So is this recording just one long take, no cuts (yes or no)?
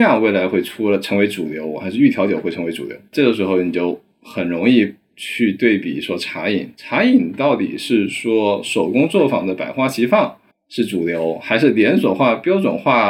no